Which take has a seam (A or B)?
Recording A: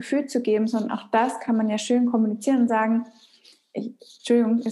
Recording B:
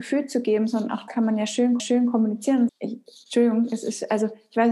B